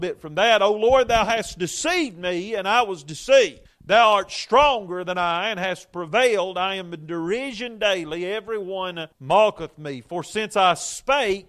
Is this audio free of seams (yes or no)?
no